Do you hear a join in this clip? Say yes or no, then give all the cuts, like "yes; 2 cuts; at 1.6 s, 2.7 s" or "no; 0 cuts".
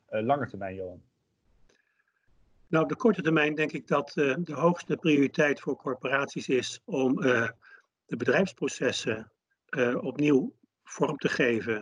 no; 0 cuts